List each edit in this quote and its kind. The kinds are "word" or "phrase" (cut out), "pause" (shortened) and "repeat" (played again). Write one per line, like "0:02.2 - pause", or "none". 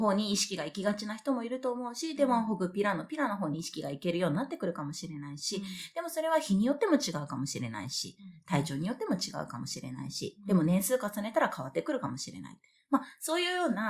none